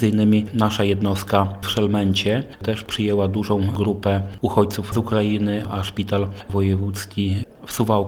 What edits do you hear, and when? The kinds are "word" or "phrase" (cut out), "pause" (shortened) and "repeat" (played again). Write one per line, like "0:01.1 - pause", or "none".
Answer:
none